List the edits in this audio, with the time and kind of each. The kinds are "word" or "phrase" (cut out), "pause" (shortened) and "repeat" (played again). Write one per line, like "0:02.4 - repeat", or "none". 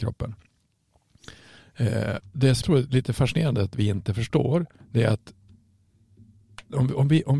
0:02.2 - word
0:02.6 - word
0:04.8 - pause